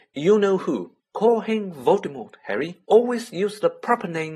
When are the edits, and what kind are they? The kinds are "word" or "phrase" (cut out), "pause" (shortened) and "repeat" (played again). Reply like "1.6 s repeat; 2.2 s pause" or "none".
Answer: 1.0 s pause; 2.8 s pause